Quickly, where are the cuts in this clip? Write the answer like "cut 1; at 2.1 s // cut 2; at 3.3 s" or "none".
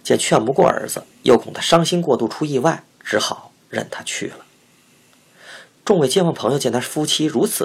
cut 1; at 1.1 s // cut 2; at 2.9 s